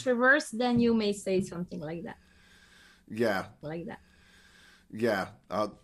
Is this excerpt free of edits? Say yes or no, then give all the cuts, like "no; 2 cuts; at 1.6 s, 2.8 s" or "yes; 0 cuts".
no; 1 cut; at 3.6 s